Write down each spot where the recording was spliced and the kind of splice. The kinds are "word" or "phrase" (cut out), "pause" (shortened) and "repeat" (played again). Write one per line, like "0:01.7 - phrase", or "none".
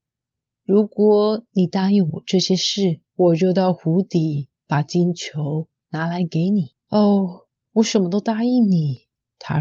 0:03.1 - pause
0:06.8 - pause